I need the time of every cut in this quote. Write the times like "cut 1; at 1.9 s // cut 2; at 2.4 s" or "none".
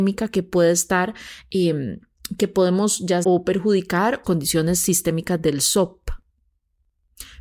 cut 1; at 3.2 s // cut 2; at 4.2 s